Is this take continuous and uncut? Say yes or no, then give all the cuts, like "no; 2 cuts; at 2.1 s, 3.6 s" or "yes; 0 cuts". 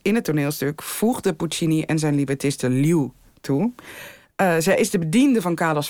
yes; 0 cuts